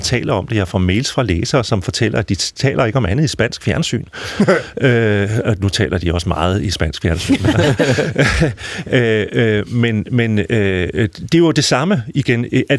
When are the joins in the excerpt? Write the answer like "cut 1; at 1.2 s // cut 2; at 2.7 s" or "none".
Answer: none